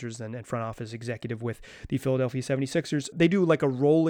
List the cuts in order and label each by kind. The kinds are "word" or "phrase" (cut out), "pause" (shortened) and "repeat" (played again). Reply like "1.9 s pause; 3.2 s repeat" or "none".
3.1 s word